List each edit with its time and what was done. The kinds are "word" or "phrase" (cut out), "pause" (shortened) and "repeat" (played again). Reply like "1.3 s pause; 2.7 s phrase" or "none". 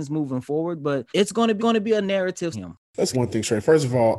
1.1 s pause; 1.6 s repeat; 2.5 s word; 3.1 s word